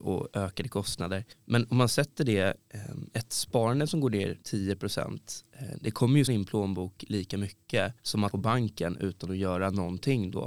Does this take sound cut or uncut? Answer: cut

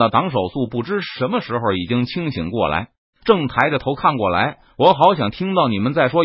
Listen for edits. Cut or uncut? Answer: uncut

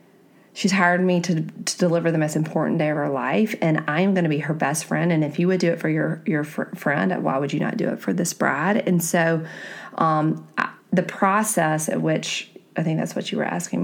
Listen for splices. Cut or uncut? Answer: cut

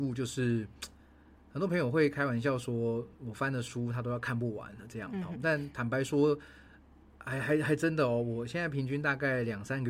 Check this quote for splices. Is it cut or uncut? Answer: uncut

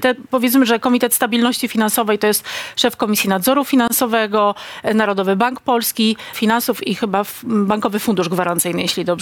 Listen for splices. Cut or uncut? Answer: cut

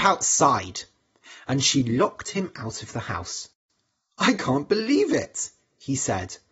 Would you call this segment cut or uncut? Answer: uncut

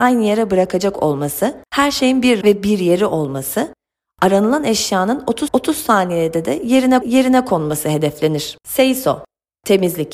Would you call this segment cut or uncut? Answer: cut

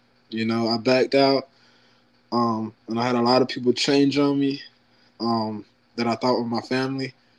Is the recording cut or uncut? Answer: uncut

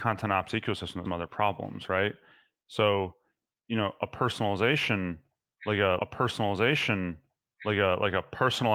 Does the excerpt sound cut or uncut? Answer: cut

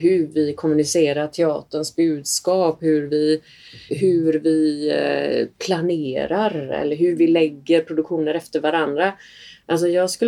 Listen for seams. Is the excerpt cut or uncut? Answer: cut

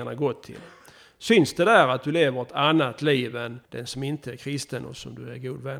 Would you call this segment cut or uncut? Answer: cut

